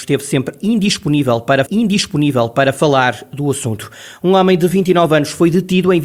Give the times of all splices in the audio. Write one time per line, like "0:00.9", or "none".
0:01.7